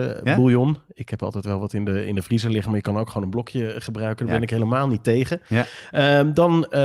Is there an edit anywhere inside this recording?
no; 0 cuts

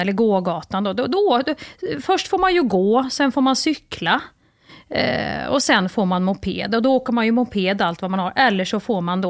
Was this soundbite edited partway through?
no; 0 cuts

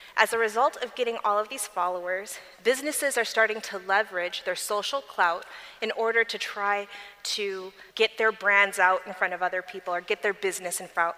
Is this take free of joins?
no; 1 cut; at 7.9 s

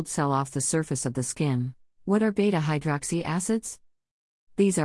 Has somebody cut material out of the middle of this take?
yes; 1 cut; at 1.9 s

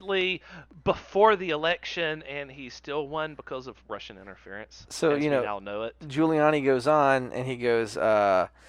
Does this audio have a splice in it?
no; 0 cuts

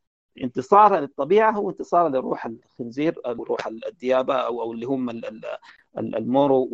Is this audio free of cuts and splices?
yes; 0 cuts

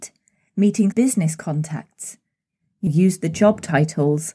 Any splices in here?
yes; 2 cuts; at 0.9 s, 2.9 s

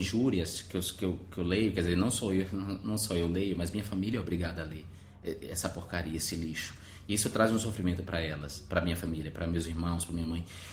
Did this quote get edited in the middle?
no; 0 cuts

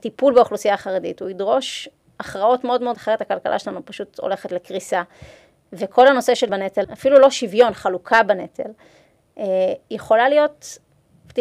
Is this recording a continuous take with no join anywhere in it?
no; 3 cuts; at 2.9 s, 6.5 s, 6.8 s

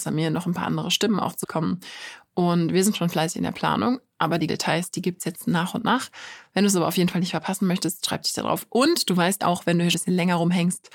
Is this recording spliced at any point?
yes; 4 cuts; at 1.4 s, 4.5 s, 9.4 s, 9.9 s

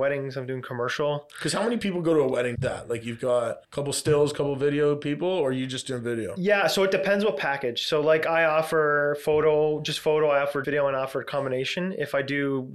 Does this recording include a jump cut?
yes; 3 cuts; at 2.5 s, 3.6 s, 10.6 s

